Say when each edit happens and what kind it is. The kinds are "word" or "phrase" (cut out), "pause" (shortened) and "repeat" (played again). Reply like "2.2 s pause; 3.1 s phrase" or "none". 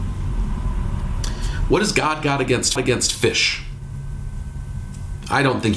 2.8 s repeat